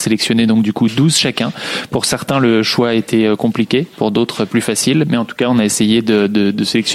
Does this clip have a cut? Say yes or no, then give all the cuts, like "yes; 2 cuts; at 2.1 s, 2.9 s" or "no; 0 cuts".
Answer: no; 0 cuts